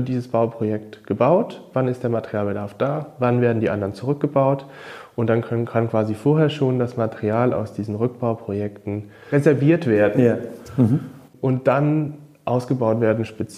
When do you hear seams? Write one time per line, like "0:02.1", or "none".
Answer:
none